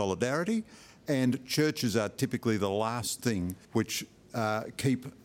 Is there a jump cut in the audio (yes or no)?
yes